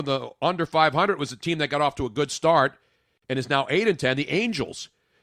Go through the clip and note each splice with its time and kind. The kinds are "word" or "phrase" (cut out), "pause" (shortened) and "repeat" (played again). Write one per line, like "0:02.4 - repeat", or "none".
none